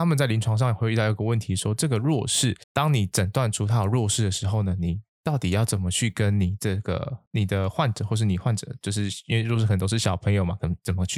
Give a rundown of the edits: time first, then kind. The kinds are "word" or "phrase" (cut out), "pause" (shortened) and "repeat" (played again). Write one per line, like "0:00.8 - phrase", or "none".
0:02.6 - pause
0:07.3 - pause